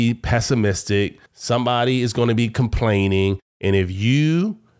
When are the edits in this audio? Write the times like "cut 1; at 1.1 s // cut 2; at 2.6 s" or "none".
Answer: cut 1; at 1.3 s